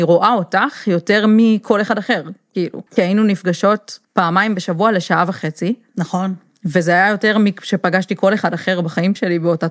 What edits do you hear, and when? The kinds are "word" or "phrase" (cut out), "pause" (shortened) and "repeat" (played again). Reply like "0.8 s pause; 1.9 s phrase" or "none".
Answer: 2.9 s pause; 4.0 s pause